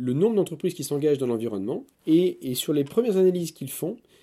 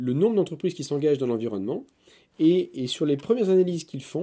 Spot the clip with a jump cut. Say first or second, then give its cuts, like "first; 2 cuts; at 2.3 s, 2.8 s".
first; 1 cut; at 1.9 s